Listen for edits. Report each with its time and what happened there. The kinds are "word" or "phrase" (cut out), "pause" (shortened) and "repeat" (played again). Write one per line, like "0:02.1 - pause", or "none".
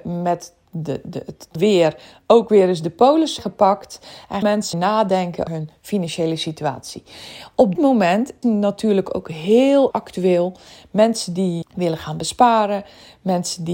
0:01.6 - word
0:03.4 - word
0:04.4 - word
0:04.7 - word
0:05.5 - word
0:07.8 - word
0:08.4 - word
0:09.9 - word
0:11.6 - word